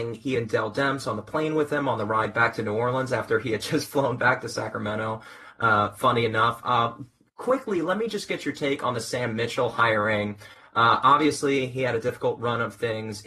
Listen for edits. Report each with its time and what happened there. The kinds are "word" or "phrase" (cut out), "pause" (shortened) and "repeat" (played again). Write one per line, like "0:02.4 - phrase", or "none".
none